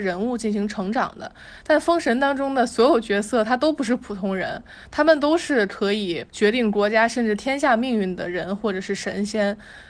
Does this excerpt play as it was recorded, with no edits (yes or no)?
no